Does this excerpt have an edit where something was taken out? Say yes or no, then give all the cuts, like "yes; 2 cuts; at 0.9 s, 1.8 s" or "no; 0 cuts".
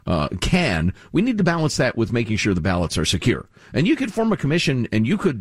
no; 0 cuts